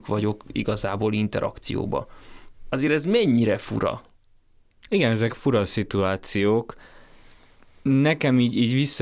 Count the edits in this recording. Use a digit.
0